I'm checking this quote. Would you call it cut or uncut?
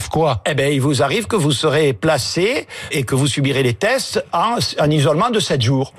cut